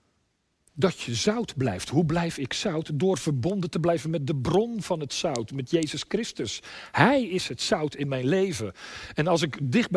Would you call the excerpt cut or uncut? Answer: uncut